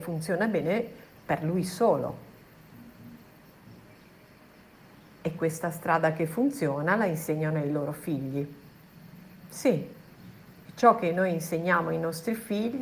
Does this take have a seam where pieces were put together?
no; 0 cuts

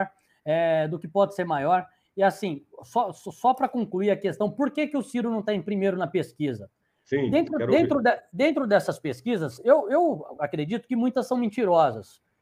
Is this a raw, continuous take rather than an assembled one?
yes; 0 cuts

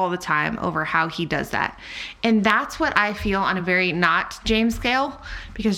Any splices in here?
no; 0 cuts

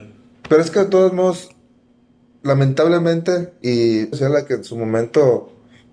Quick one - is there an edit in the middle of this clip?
yes; 2 cuts; at 3.6 s, 4.1 s

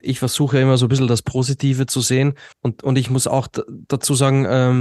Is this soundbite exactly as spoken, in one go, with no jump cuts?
no; 1 cut; at 2.5 s

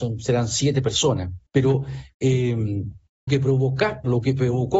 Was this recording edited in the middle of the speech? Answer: yes; 2 cuts; at 1.5 s, 3.3 s

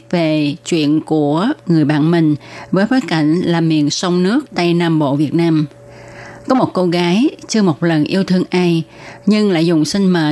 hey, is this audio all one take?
yes; 0 cuts

